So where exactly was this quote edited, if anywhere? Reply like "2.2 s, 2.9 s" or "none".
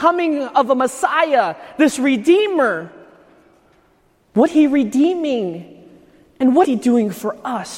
4.5 s, 6.6 s